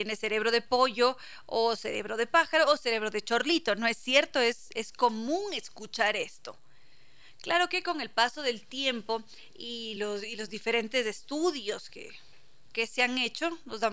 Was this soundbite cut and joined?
no; 0 cuts

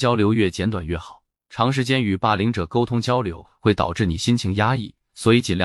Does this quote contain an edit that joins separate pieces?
yes; 1 cut; at 1.4 s

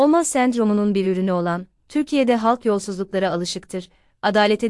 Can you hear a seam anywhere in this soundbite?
no; 0 cuts

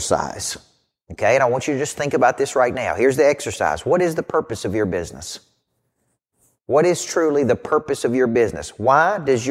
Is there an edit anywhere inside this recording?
no; 0 cuts

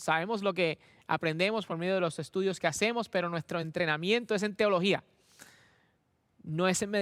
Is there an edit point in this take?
no; 0 cuts

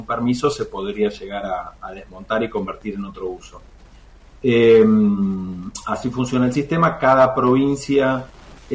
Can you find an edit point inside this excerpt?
no; 0 cuts

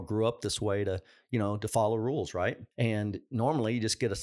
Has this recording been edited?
yes; 1 cut; at 2.7 s

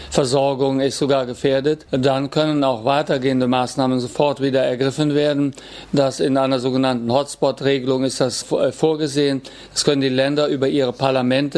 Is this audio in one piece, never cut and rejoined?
no; 2 cuts; at 6.2 s, 8.4 s

